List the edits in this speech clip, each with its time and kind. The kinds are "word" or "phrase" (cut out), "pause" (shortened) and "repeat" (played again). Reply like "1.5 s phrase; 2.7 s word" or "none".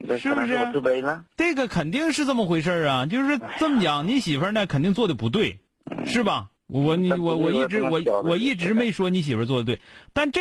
1.3 s pause; 5.7 s pause; 6.6 s pause